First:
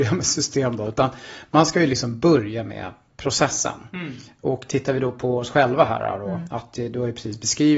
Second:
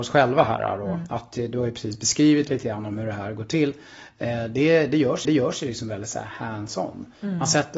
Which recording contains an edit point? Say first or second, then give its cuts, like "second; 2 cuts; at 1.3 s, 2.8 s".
second; 1 cut; at 5.2 s